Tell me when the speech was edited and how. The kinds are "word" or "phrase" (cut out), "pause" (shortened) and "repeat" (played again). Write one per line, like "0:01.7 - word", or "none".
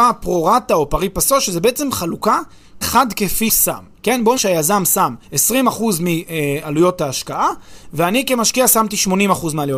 0:02.8 - word
0:03.5 - word
0:04.4 - word
0:05.2 - pause